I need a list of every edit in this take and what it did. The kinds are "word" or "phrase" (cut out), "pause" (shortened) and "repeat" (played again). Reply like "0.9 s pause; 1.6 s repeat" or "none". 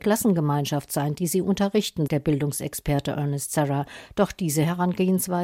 2.1 s word